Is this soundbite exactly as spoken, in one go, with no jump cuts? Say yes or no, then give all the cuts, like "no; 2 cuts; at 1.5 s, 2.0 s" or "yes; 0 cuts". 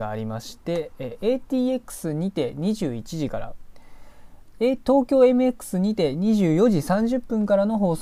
no; 1 cut; at 4.5 s